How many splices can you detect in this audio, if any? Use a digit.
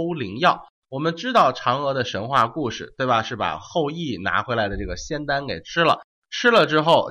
0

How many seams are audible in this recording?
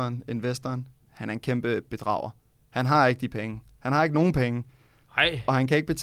0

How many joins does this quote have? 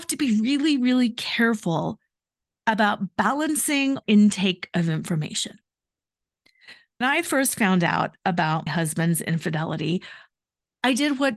3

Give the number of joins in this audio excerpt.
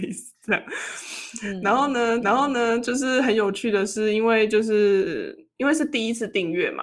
1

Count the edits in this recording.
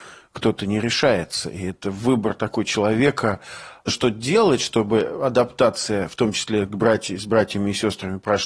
0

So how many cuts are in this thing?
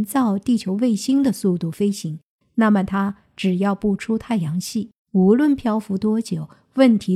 1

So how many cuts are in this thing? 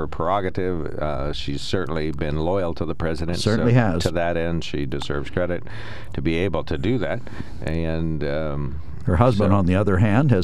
0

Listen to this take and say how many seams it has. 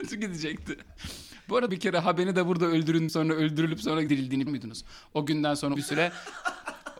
5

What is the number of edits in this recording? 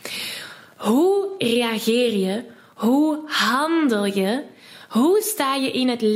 0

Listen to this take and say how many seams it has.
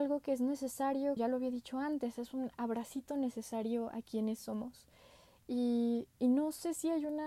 1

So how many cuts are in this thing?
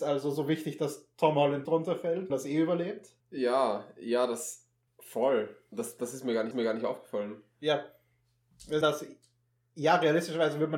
6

